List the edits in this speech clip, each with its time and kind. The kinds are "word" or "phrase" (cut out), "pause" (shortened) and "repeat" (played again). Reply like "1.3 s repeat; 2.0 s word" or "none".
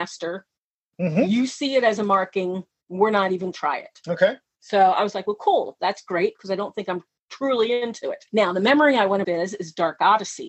3.5 s phrase; 8.3 s pause; 9.2 s phrase